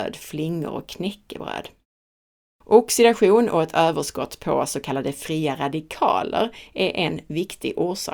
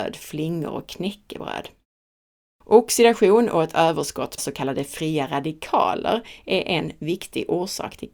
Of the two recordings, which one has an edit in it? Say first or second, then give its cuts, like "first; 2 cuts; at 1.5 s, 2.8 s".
second; 1 cut; at 4.4 s